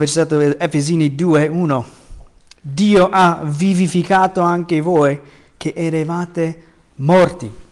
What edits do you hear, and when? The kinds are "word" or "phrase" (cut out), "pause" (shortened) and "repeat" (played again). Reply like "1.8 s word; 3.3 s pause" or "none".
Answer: none